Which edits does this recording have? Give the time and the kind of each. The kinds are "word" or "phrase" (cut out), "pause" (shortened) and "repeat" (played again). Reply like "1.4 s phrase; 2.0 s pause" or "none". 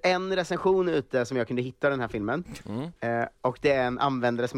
3.0 s pause